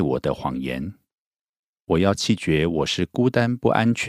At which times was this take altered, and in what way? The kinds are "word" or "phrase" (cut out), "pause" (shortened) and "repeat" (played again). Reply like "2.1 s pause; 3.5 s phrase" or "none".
none